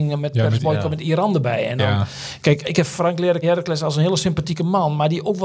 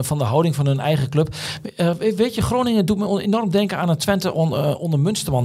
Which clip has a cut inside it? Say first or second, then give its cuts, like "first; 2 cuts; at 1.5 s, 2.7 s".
first; 2 cuts; at 2.6 s, 3.4 s